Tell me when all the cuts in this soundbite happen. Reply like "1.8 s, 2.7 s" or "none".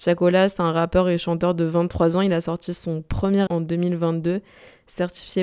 3.5 s